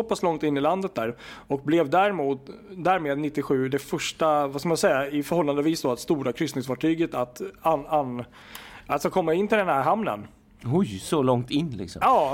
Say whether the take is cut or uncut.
uncut